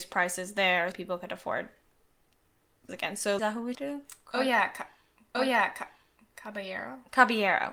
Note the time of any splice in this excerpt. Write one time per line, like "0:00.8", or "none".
0:00.9
0:02.9
0:03.4
0:03.7
0:05.3

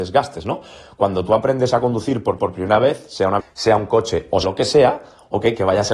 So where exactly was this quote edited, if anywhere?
0:02.4
0:03.4
0:04.4

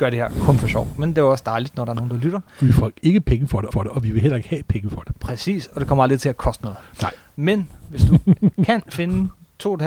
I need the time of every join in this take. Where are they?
0:03.7

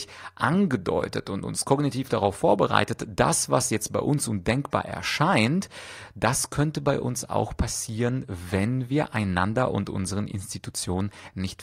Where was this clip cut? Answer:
none

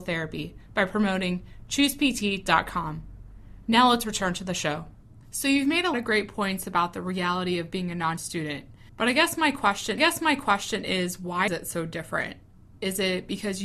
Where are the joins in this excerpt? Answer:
0:05.2
0:05.9
0:08.2
0:08.9
0:10.0
0:11.5

